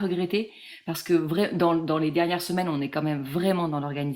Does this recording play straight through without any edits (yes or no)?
yes